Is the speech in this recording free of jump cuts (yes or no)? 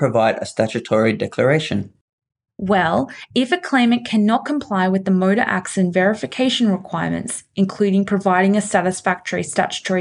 yes